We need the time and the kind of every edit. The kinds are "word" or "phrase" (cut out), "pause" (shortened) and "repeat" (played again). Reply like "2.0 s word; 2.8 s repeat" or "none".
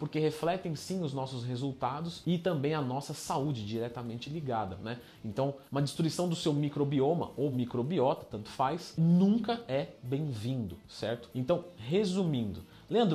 none